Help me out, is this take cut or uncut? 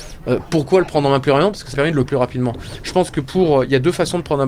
cut